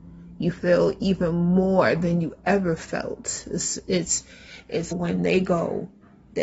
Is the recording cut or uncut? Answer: cut